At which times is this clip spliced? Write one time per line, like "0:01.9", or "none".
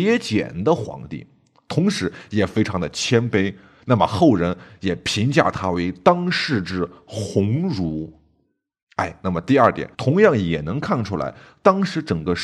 0:09.9